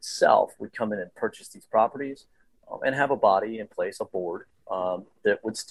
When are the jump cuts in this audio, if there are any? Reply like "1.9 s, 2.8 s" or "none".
none